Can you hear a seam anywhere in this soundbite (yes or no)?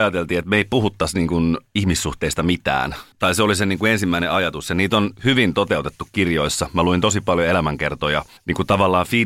yes